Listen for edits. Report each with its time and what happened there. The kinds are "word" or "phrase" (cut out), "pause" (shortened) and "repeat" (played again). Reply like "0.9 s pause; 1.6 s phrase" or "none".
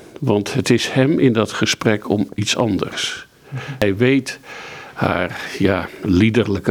none